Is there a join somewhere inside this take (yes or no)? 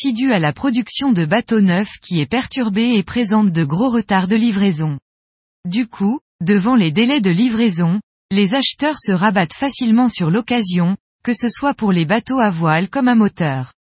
no